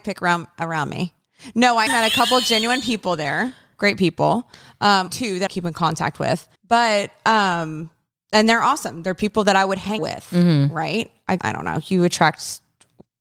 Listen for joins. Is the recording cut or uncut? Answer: cut